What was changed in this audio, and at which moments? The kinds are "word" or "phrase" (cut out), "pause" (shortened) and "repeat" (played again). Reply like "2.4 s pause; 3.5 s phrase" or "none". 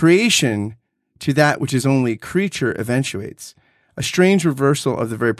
none